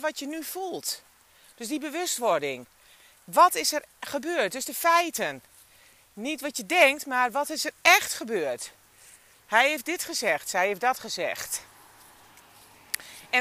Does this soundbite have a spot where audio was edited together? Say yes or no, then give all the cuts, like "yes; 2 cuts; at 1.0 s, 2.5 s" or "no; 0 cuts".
no; 0 cuts